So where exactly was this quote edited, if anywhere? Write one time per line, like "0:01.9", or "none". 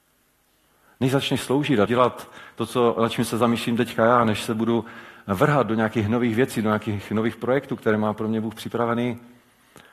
0:01.9